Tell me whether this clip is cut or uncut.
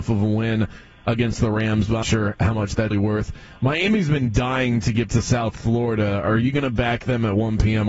cut